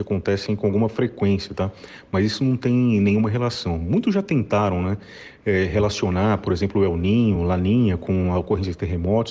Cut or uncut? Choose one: uncut